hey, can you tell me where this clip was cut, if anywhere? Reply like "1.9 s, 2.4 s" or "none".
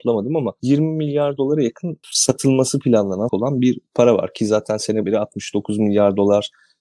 3.3 s, 5.0 s